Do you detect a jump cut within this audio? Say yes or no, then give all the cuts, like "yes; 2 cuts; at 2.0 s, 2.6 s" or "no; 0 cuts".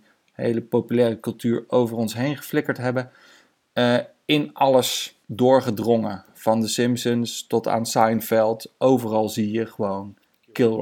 yes; 1 cut; at 5.2 s